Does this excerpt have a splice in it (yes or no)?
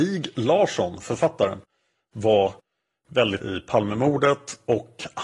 yes